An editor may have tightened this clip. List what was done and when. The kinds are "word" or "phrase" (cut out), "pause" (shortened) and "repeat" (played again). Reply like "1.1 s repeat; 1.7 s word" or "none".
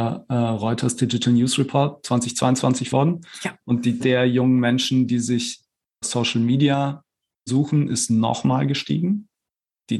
2.9 s word; 4.0 s word; 6.0 s word; 7.5 s word